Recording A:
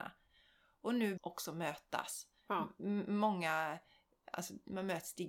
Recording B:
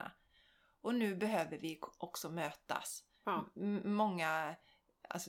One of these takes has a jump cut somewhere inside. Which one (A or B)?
A